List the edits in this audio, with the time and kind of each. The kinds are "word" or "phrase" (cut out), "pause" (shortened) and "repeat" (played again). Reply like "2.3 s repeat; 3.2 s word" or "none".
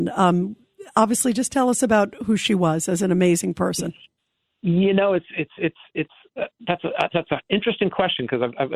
none